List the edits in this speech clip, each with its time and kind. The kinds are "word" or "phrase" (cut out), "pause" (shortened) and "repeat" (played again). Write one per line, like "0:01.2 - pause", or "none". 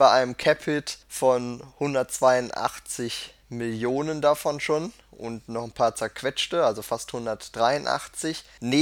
0:01.0 - pause